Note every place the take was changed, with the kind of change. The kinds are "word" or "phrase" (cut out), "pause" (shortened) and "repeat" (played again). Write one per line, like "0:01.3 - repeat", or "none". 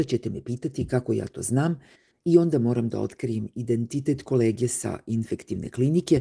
none